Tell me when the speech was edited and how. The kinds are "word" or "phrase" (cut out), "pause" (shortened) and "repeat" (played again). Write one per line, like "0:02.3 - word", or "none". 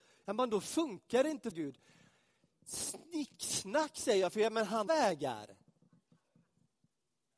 0:01.5 - word
0:04.9 - phrase